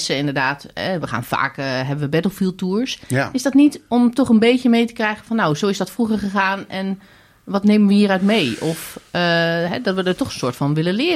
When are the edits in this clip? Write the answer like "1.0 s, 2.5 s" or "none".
none